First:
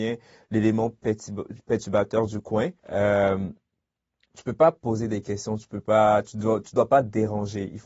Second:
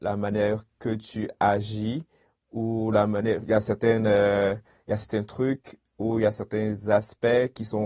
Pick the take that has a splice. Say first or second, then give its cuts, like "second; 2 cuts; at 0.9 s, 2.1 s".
first; 1 cut; at 2.8 s